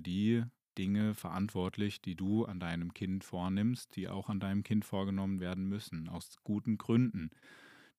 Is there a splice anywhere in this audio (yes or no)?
no